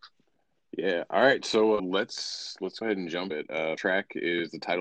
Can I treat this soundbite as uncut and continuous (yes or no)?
no